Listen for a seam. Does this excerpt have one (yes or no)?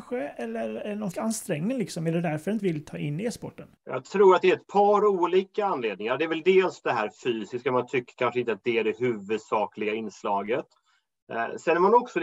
yes